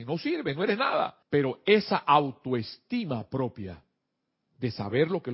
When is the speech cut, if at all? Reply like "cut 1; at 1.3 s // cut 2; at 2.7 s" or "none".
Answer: cut 1; at 1.2 s